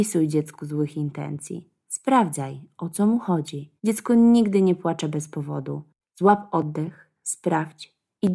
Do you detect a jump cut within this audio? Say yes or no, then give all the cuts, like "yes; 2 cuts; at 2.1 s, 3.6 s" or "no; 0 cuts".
yes; 2 cuts; at 3.8 s, 6.0 s